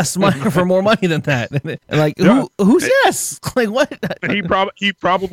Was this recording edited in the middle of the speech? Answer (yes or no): yes